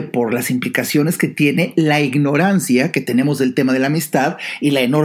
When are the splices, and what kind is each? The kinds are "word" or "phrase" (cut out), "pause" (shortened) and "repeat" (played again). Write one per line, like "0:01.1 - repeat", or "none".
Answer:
none